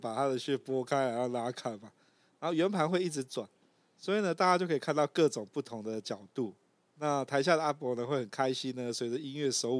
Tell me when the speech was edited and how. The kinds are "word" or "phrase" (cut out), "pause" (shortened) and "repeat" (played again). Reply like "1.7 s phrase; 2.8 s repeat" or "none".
none